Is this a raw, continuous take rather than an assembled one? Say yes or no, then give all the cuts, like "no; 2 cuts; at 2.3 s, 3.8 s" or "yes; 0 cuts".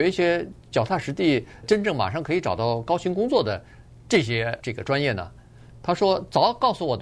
no; 2 cuts; at 1.6 s, 4.6 s